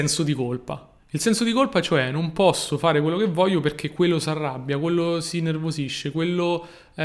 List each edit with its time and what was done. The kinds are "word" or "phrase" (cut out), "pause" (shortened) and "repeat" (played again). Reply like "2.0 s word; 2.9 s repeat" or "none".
1.0 s pause